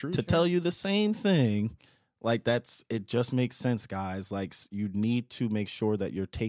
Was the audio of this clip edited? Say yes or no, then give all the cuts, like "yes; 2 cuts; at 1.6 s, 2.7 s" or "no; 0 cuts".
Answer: no; 0 cuts